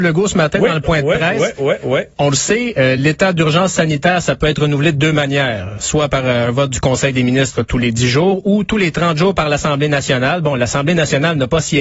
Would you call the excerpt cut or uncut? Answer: uncut